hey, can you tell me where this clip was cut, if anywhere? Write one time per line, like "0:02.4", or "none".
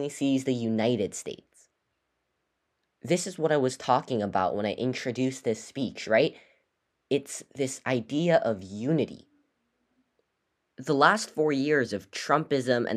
none

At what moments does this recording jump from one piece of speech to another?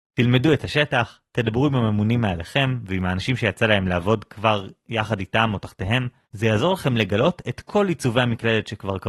0:06.2

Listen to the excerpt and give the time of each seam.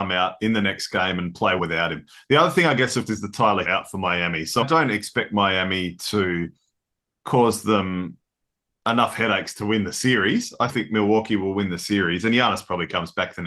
0:01.6
0:03.1
0:03.6
0:04.6
0:10.7

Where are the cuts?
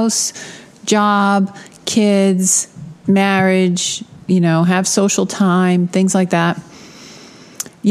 0:04.1

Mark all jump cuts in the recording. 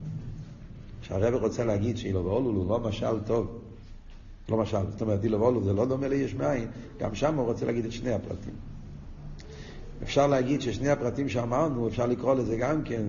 none

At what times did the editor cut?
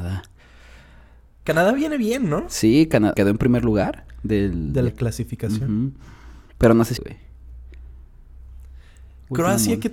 0:03.1
0:04.9
0:07.0

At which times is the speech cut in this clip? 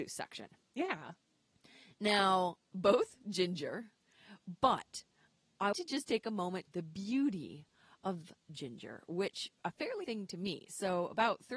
0:05.7
0:06.7
0:08.4
0:09.6
0:10.0

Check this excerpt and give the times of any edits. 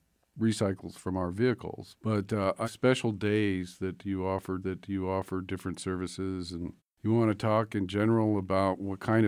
0:02.6
0:04.6
0:06.8

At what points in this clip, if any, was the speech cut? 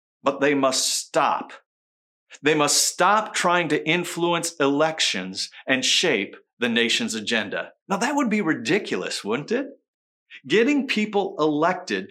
0:07.8

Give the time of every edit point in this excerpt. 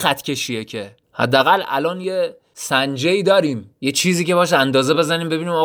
0:01.0
0:03.8

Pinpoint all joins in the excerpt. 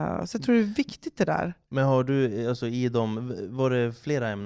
none

